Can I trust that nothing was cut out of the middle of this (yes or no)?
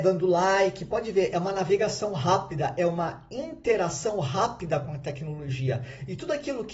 yes